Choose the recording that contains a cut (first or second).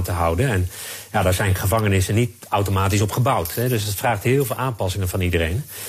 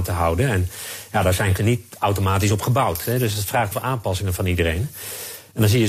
second